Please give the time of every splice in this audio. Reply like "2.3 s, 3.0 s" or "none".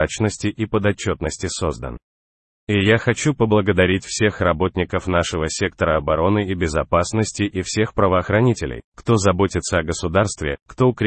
none